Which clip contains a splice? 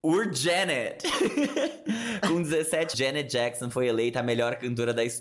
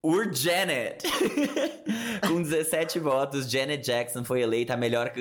first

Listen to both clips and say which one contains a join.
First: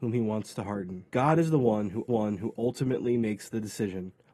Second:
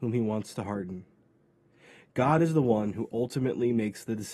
first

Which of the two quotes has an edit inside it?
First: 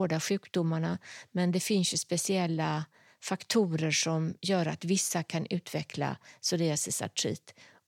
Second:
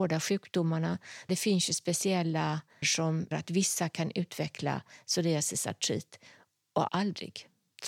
second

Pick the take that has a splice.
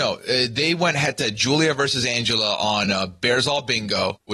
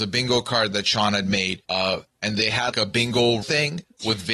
second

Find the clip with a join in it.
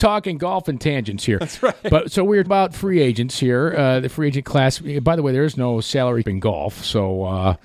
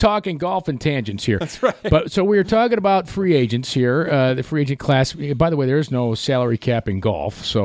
first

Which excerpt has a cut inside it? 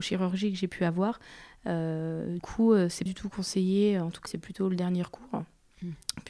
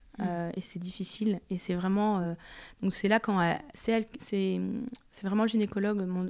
first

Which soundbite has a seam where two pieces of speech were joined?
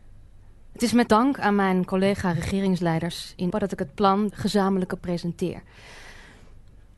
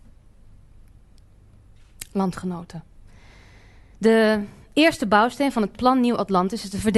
first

